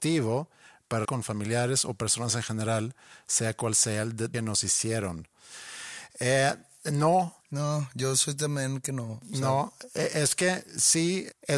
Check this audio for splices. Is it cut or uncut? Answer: cut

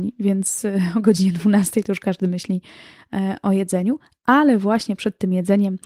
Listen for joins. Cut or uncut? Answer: uncut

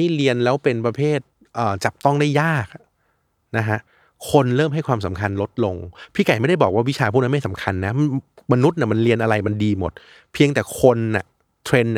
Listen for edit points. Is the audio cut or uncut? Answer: uncut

